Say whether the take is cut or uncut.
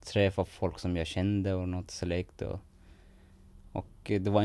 uncut